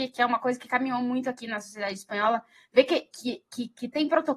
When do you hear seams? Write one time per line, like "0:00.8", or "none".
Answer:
none

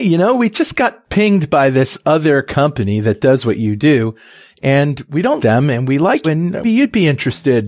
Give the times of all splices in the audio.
0:05.4
0:06.2
0:06.6

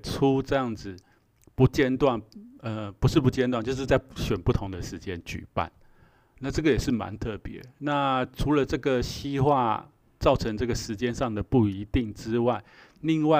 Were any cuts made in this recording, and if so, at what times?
none

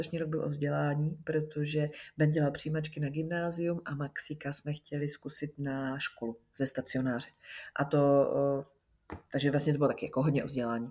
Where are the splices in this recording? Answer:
none

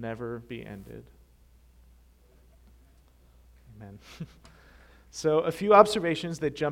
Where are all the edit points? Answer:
none

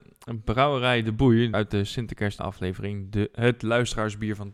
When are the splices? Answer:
0:01.5
0:02.4

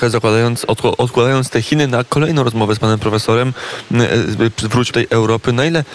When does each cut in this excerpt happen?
0:04.9

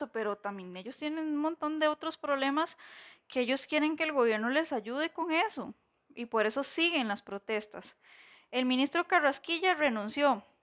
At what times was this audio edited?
none

